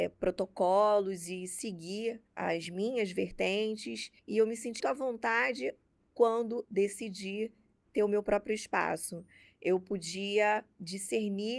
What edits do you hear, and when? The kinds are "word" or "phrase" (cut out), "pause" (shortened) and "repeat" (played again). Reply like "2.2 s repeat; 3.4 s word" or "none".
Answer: 2.3 s pause; 4.2 s pause; 4.8 s word; 6.6 s word